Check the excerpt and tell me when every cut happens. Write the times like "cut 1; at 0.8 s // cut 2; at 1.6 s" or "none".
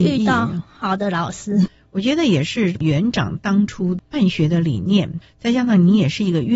none